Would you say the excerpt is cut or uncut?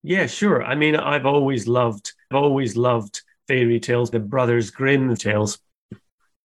cut